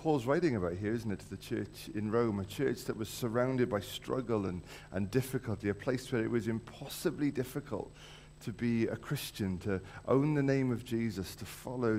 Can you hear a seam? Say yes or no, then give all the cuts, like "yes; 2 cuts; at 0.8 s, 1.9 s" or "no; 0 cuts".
no; 0 cuts